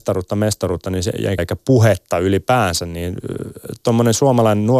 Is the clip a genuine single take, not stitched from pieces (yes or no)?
no